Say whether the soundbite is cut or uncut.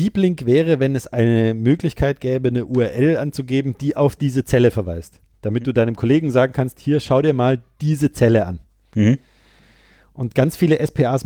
uncut